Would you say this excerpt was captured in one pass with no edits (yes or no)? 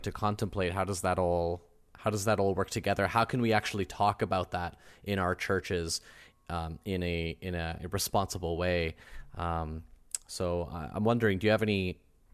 yes